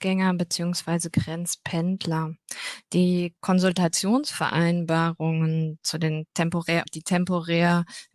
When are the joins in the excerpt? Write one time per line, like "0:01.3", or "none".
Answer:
0:05.8
0:06.9